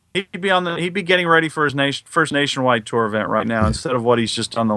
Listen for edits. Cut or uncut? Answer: uncut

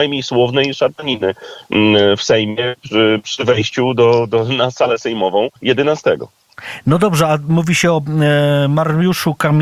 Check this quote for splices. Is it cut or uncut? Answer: cut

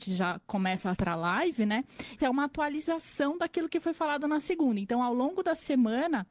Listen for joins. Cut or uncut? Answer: cut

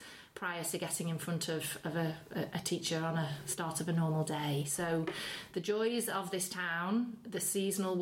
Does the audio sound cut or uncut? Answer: uncut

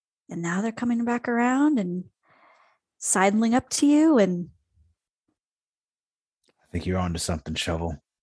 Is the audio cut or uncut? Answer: uncut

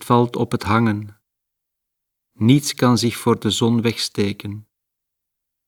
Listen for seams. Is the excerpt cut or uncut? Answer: uncut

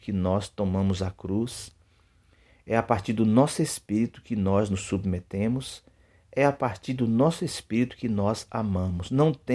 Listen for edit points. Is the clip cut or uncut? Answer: uncut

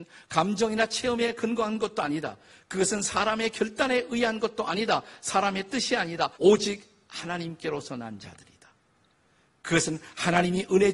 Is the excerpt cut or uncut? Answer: cut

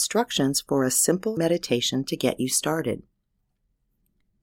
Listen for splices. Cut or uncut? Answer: cut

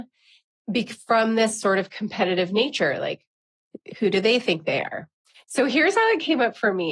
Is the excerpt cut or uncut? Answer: uncut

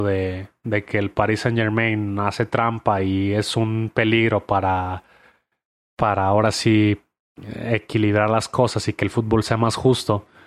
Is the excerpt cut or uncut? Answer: uncut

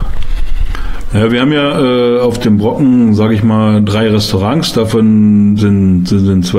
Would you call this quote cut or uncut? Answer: uncut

